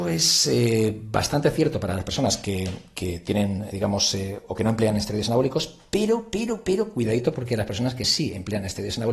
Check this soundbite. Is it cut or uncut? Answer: cut